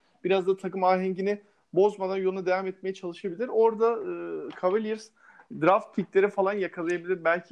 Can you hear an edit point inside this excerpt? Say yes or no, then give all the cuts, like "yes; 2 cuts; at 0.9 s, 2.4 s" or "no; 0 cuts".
no; 0 cuts